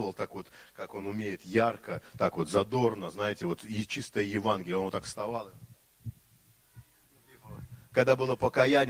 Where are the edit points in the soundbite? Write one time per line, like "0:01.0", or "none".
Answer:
none